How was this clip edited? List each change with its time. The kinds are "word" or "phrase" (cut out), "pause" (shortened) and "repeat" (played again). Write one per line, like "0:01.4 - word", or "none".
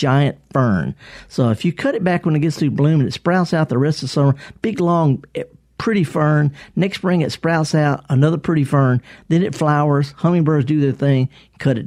none